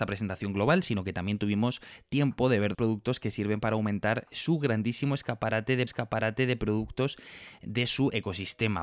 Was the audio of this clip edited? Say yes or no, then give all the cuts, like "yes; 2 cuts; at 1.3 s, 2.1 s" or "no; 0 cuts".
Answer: yes; 2 cuts; at 2.7 s, 5.9 s